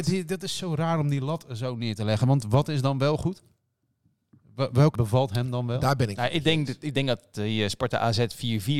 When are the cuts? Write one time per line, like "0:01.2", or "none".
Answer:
0:04.9